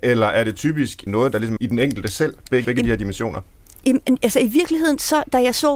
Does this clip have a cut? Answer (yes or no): yes